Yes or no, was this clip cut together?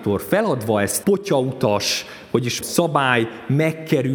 yes